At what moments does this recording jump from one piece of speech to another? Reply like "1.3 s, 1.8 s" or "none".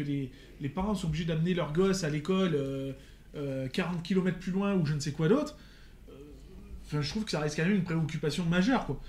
none